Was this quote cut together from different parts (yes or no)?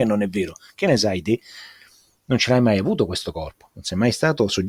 no